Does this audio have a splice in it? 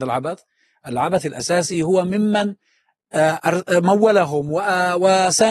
no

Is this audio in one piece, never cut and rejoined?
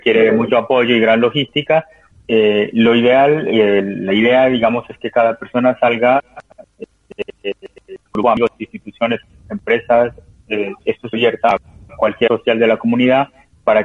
no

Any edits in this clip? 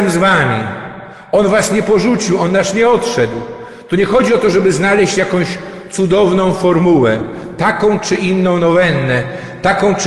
no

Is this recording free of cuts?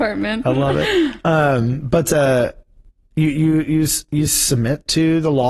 yes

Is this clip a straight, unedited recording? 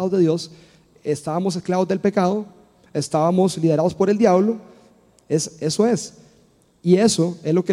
yes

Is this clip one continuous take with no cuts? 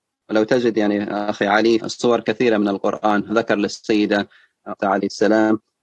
no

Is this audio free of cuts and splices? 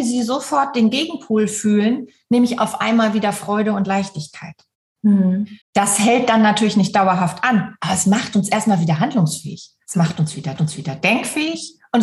no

